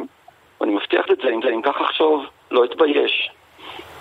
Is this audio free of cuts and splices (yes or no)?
no